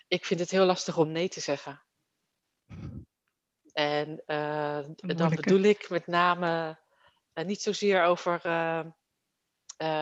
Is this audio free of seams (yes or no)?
yes